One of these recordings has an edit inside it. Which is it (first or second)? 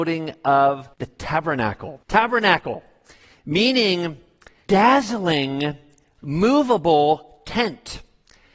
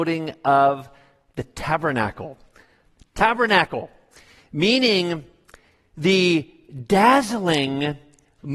first